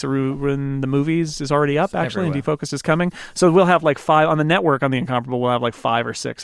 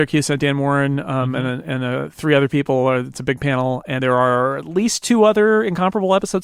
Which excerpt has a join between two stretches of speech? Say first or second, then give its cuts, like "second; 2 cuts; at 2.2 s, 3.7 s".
second; 1 cut; at 4.0 s